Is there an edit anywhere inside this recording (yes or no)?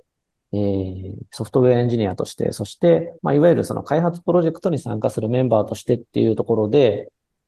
yes